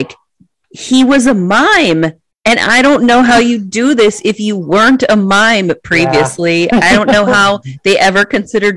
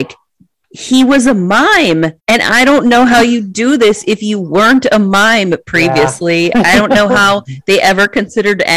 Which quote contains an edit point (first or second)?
second